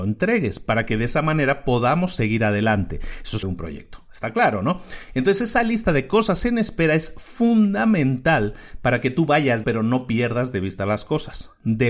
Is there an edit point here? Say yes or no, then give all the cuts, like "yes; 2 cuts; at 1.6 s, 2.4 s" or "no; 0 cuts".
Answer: yes; 2 cuts; at 3.4 s, 9.6 s